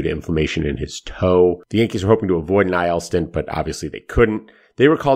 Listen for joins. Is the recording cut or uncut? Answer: uncut